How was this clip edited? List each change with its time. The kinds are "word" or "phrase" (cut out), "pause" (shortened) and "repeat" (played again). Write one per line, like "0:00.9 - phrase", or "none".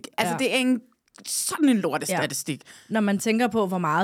none